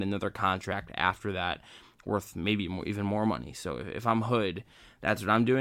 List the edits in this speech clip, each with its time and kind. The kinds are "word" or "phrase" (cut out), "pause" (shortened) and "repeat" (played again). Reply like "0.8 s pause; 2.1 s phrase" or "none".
none